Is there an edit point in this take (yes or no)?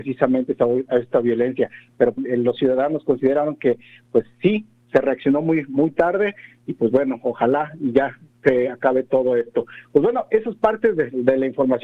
yes